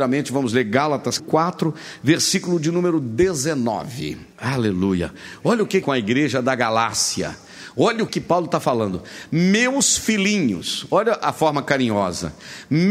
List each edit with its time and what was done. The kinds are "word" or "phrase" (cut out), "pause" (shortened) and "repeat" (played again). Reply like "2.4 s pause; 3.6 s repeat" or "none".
1.2 s word; 4.3 s pause; 5.8 s phrase; 8.1 s word